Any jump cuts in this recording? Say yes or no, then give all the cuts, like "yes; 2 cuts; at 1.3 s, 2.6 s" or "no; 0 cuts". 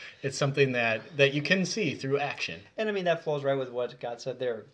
no; 0 cuts